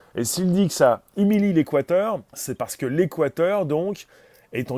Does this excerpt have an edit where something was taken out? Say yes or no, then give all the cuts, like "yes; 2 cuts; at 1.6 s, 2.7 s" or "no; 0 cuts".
yes; 2 cuts; at 1.1 s, 2.3 s